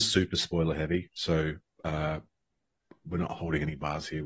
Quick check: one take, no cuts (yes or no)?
yes